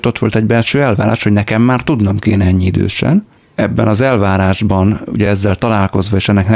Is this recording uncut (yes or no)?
yes